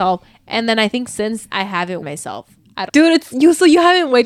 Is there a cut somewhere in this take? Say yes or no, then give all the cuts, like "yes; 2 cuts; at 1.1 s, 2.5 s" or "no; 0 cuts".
yes; 3 cuts; at 1.5 s, 2.0 s, 2.9 s